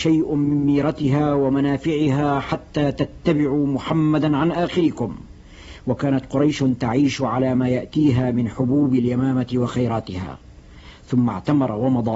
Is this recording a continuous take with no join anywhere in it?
yes; 0 cuts

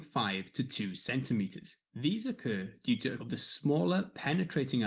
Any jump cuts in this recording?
yes; 2 cuts; at 1.9 s, 3.2 s

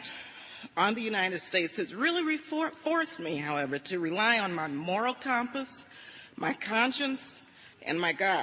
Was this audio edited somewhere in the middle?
no; 0 cuts

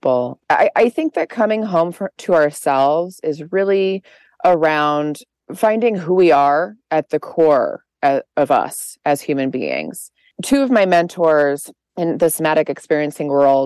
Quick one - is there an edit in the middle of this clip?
no; 0 cuts

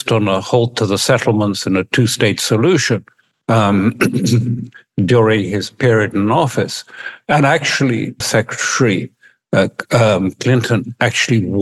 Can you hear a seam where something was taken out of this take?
yes; 1 cut; at 8.2 s

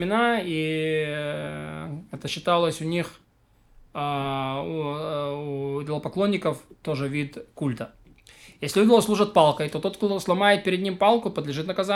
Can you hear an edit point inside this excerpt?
no; 0 cuts

